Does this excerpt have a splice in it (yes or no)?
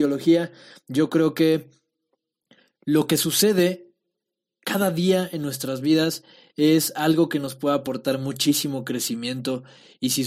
no